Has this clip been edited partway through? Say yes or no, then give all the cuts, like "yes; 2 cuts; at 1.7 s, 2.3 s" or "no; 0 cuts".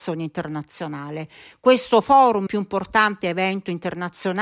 yes; 1 cut; at 2.5 s